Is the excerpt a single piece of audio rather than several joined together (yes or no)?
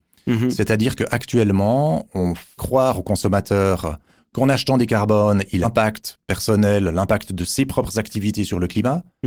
no